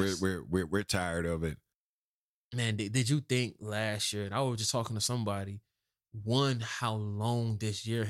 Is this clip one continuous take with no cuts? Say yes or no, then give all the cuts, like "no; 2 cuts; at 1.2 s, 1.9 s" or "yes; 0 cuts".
yes; 0 cuts